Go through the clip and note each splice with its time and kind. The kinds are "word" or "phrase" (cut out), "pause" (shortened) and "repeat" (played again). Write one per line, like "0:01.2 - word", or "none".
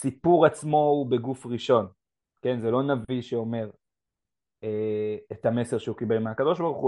none